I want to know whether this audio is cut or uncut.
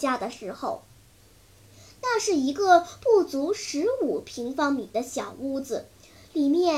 uncut